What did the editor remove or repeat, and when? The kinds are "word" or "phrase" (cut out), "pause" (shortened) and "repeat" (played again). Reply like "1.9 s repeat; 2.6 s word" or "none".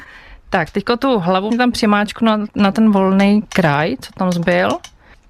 1.5 s word